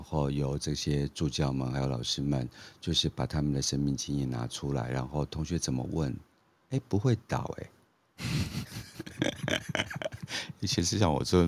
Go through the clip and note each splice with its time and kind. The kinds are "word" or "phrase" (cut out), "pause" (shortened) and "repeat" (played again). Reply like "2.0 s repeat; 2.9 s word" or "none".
none